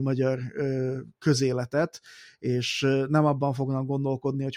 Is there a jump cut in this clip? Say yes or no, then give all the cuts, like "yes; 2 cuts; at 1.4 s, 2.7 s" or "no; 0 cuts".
no; 0 cuts